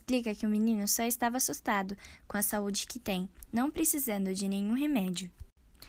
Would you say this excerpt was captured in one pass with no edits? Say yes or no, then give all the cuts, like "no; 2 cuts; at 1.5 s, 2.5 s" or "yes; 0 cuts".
yes; 0 cuts